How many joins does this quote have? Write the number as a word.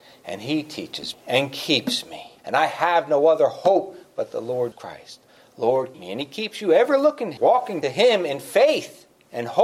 six